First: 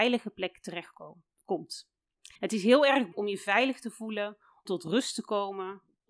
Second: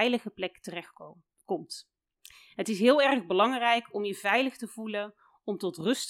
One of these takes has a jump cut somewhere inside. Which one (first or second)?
first